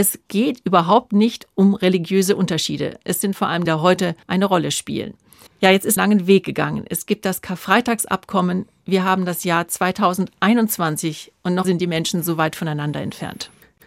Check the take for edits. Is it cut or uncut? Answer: cut